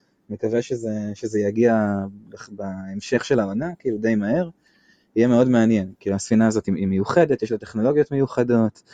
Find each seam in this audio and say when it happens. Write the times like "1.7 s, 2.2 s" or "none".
none